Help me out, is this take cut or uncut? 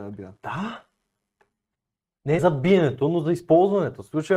cut